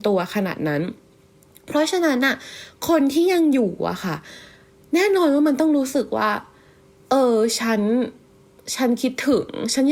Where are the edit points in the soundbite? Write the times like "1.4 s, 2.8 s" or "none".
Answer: none